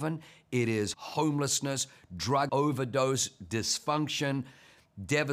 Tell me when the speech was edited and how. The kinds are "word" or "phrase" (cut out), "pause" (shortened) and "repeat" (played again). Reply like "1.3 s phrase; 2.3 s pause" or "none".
0.9 s word; 2.5 s word